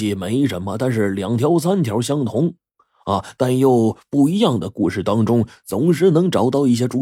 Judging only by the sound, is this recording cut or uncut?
uncut